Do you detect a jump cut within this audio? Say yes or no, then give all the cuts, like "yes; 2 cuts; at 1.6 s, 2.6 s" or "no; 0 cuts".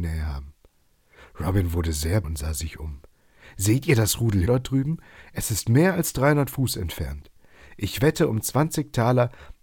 yes; 2 cuts; at 2.2 s, 4.5 s